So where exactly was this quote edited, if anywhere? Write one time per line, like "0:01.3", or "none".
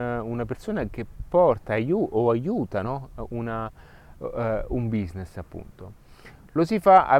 none